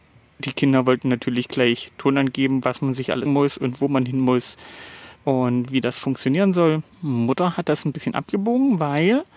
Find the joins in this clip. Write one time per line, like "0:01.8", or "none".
0:03.3
0:05.2
0:06.9